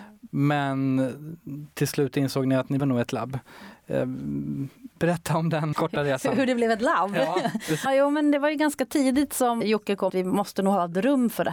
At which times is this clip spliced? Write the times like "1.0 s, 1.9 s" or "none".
2.8 s, 4.9 s, 5.7 s, 7.9 s, 9.6 s, 10.1 s